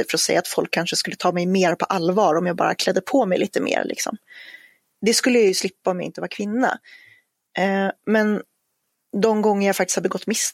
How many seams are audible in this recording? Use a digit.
0